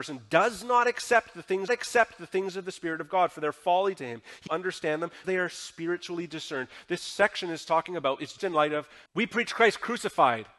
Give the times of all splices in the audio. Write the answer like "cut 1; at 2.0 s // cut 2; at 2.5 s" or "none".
cut 1; at 1.7 s // cut 2; at 4.5 s // cut 3; at 5.2 s // cut 4; at 8.4 s // cut 5; at 9.1 s